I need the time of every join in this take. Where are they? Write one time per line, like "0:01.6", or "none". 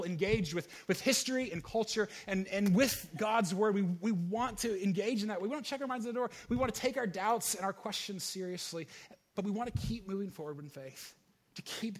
none